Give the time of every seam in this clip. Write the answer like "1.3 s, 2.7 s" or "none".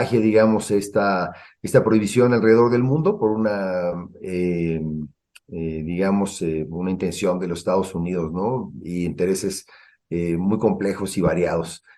none